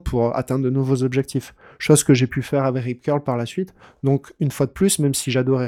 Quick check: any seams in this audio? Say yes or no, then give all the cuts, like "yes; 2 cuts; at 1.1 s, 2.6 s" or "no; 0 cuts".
no; 0 cuts